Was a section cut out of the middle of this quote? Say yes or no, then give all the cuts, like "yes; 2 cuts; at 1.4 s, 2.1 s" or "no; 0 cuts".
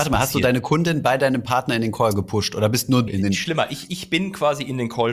yes; 1 cut; at 3.1 s